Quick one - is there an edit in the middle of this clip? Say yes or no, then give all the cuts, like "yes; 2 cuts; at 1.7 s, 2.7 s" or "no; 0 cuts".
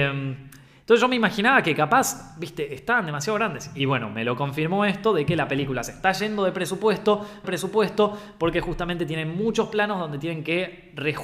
yes; 1 cut; at 7.4 s